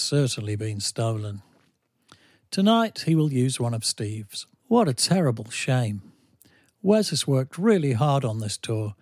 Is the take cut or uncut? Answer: cut